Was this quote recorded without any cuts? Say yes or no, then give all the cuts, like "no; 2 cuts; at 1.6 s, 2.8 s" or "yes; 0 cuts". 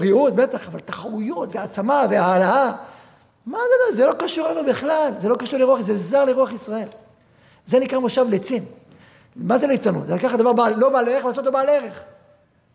yes; 0 cuts